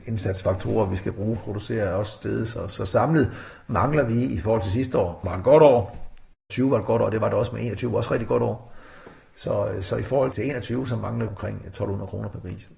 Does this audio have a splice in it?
yes; 4 cuts; at 1.4 s, 5.2 s, 10.3 s, 11.3 s

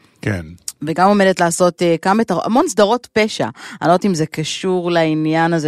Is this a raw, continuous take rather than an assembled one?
yes; 0 cuts

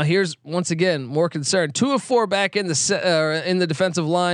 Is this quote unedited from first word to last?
yes; 0 cuts

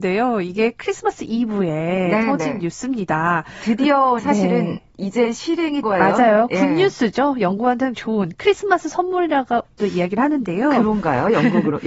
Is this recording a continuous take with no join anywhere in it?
no; 4 cuts; at 4.2 s, 5.8 s, 7.9 s, 9.8 s

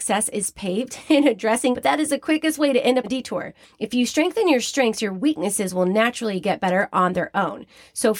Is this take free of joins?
no; 3 cuts; at 1.7 s, 3.0 s, 3.6 s

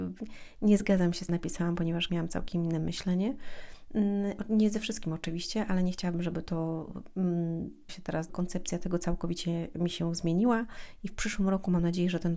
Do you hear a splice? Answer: yes; 4 cuts; at 1.3 s, 2.1 s, 7.9 s, 8.3 s

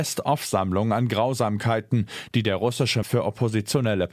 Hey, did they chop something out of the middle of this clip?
yes; 1 cut; at 3.0 s

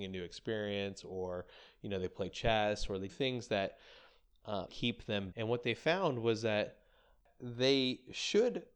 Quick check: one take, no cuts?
no; 3 cuts; at 3.1 s, 4.7 s, 5.3 s

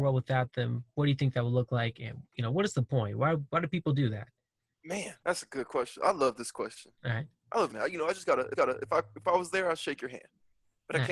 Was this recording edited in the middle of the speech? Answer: yes; 4 cuts; at 5.2 s, 7.0 s, 7.7 s, 8.5 s

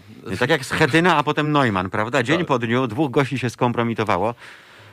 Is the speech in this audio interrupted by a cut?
no; 0 cuts

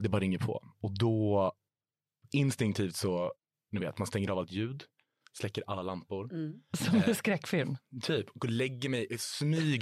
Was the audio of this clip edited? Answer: no; 0 cuts

